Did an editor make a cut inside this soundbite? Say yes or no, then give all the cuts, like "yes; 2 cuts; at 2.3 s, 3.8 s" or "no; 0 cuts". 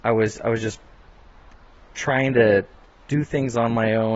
no; 0 cuts